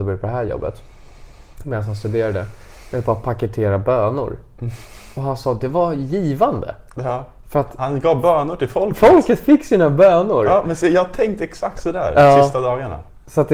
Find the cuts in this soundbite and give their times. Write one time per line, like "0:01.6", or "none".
none

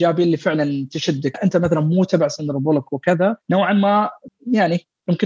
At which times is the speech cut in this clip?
0:01.3
0:03.4

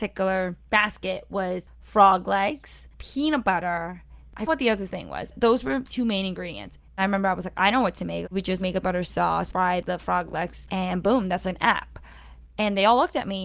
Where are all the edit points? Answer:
0:02.9
0:04.5
0:05.3
0:06.9
0:08.8
0:09.5

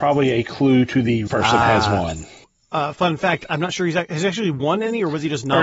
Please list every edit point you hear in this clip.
0:01.3
0:02.4

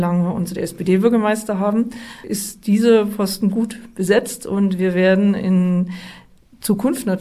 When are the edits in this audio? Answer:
none

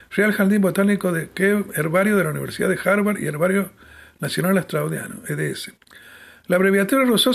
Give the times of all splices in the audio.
none

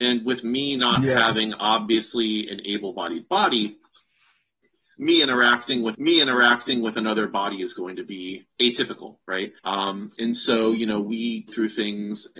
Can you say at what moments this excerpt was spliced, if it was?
0:05.9
0:08.5
0:09.6
0:11.5

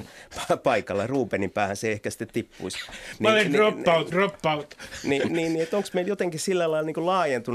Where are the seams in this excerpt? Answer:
0:04.1
0:05.3

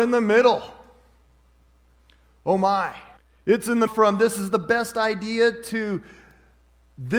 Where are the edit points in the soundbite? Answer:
0:03.2
0:03.9

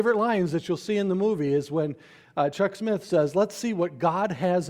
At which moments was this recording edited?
none

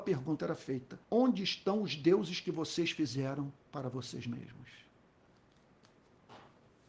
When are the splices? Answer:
0:01.0
0:03.6

